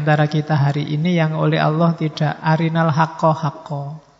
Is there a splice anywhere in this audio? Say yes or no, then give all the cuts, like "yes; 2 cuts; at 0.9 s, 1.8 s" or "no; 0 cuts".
no; 0 cuts